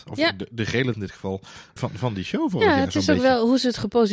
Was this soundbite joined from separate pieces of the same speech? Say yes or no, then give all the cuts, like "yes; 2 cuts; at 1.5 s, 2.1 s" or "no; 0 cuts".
yes; 2 cuts; at 0.9 s, 1.8 s